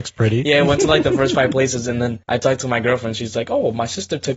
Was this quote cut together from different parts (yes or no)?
yes